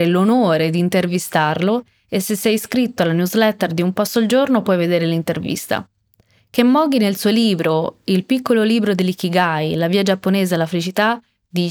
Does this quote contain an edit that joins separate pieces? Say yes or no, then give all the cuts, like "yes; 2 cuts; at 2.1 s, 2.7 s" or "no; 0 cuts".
no; 0 cuts